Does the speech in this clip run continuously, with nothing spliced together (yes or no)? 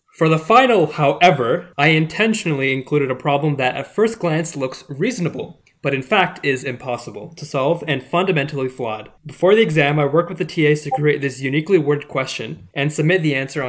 no